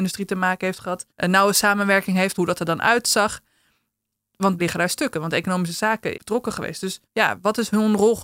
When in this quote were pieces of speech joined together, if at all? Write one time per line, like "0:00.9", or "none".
0:01.1
0:02.3
0:04.6
0:06.1
0:07.0